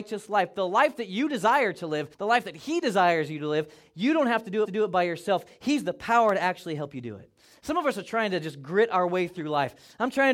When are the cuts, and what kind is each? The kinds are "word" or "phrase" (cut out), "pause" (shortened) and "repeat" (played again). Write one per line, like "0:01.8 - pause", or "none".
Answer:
0:02.1 - pause
0:04.6 - repeat